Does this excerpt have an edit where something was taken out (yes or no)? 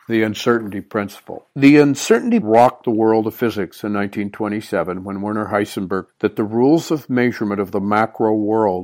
yes